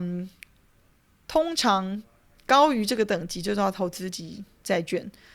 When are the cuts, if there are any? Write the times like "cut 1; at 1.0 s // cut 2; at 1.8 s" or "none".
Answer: none